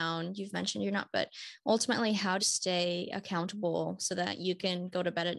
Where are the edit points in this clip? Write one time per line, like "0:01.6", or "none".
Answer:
0:01.1
0:02.4